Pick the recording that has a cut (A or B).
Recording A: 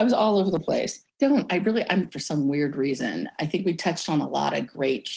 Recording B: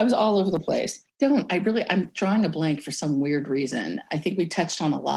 A